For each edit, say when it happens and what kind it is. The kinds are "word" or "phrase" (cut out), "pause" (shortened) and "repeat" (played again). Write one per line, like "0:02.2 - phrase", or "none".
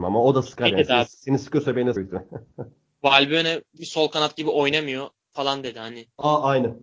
0:02.0 - word
0:03.8 - phrase